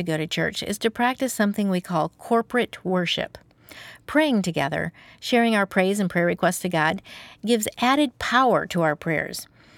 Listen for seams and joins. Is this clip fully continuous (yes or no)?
yes